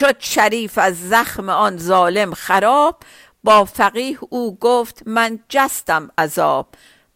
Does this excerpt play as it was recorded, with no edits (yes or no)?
yes